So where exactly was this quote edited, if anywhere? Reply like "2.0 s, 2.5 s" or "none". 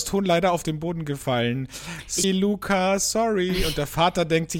2.2 s